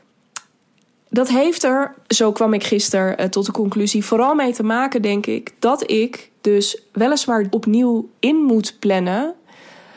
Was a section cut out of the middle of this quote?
yes; 3 cuts; at 2.0 s, 7.5 s, 8.2 s

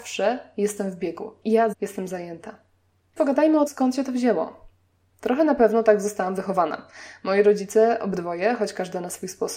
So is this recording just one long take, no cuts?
no; 3 cuts; at 1.7 s, 3.2 s, 3.7 s

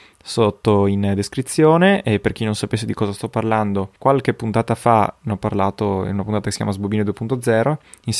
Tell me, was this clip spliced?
yes; 1 cut; at 4.0 s

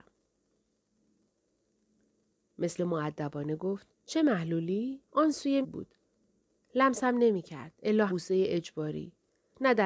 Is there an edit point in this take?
yes; 5 cuts; at 2.8 s, 3.9 s, 5.1 s, 5.6 s, 8.1 s

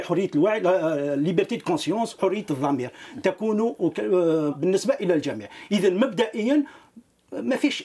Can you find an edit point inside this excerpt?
yes; 2 cuts; at 2.2 s, 4.5 s

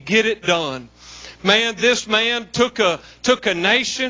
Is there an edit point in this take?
no; 0 cuts

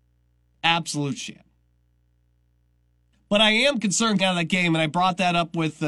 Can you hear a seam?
yes; 1 cut; at 4.2 s

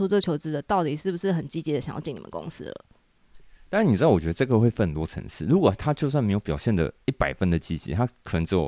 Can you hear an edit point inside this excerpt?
no; 0 cuts

